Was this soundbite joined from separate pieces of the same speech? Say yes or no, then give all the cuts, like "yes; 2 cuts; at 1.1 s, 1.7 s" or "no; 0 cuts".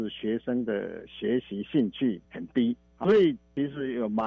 yes; 1 cut; at 2.2 s